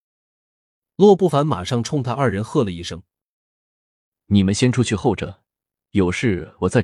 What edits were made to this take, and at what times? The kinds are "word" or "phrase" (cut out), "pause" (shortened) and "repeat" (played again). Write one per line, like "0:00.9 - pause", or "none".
none